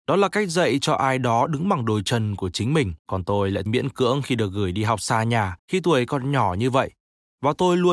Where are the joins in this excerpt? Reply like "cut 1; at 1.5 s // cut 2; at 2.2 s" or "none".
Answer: cut 1; at 3.0 s // cut 2; at 3.7 s // cut 3; at 5.6 s